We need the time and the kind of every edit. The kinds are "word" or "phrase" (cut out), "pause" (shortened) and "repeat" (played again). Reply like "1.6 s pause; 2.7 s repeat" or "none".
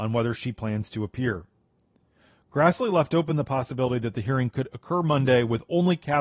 none